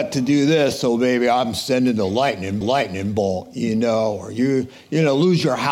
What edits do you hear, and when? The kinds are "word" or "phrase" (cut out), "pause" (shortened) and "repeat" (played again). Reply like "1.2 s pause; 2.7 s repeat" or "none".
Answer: 2.6 s repeat